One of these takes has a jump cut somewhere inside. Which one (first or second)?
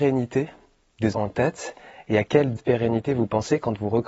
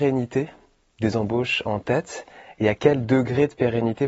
first